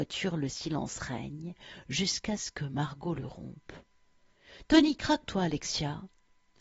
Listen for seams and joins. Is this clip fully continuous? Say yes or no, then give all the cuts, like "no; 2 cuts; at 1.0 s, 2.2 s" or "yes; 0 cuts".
no; 1 cut; at 5.3 s